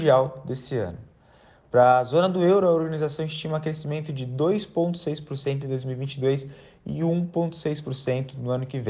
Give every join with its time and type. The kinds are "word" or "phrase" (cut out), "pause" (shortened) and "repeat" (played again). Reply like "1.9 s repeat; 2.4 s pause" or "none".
none